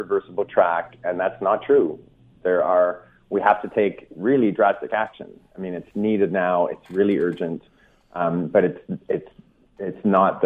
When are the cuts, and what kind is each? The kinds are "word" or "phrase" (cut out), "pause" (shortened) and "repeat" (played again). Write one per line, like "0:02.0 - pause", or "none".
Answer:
none